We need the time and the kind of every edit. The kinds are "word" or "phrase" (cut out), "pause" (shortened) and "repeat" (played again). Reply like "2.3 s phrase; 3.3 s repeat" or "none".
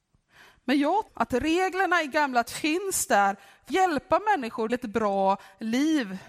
1.1 s word; 2.4 s word; 3.7 s word; 4.7 s word